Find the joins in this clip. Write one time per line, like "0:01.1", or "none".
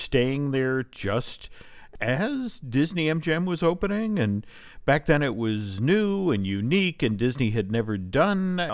none